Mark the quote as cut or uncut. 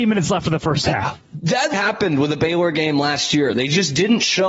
cut